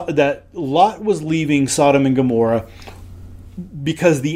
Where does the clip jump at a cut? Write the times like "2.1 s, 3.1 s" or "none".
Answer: none